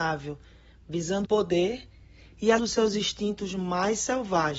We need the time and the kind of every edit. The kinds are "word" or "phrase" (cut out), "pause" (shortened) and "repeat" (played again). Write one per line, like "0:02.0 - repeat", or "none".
0:01.2 - word
0:02.6 - word